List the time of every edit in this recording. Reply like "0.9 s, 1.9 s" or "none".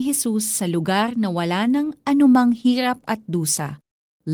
none